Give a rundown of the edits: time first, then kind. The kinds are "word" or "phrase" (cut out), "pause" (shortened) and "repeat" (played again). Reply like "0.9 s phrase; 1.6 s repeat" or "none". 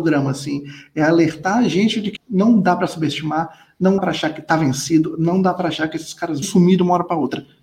2.2 s word; 4.0 s word; 6.4 s word